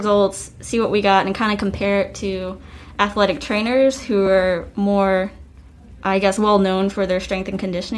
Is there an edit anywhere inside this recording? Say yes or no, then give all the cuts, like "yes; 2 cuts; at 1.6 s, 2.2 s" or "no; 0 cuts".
no; 0 cuts